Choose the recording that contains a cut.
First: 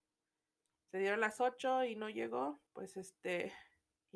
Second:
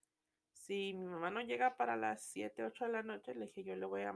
first; 1 cut; at 2.7 s

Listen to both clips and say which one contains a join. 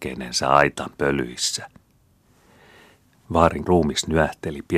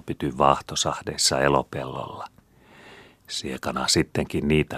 first; 1 cut; at 3.7 s

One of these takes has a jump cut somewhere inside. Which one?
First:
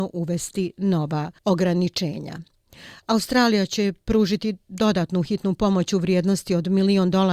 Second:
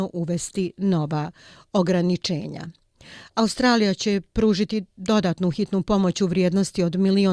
first; 1 cut; at 1.4 s

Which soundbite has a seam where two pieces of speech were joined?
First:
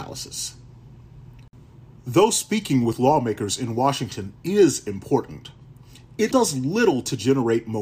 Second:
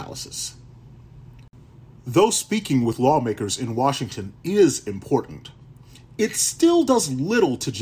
first; 1 cut; at 6.3 s

